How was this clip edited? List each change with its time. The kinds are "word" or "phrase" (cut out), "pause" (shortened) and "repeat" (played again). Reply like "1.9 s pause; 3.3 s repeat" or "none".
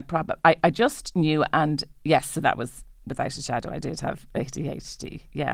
2.4 s word